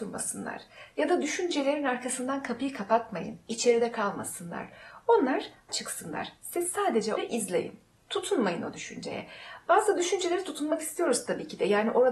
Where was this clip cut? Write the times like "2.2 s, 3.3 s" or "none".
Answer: 5.7 s, 7.2 s